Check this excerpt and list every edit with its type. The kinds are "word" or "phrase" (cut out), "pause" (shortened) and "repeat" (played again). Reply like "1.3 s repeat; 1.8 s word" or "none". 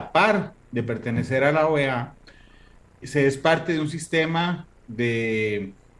3.0 s word